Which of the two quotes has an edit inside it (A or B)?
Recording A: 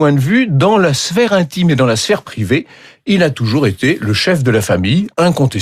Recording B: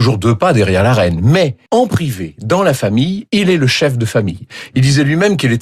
B